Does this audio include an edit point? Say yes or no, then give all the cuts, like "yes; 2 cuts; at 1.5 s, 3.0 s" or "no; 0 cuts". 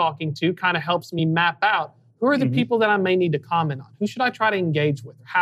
no; 0 cuts